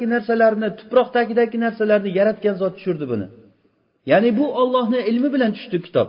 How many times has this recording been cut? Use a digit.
0